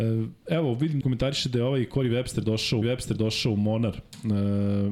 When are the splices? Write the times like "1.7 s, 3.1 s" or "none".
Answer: 1.0 s, 2.8 s